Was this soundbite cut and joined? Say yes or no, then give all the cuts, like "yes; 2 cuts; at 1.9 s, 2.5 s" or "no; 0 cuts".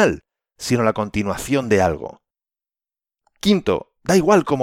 no; 0 cuts